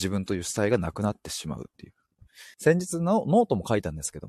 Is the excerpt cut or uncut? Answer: cut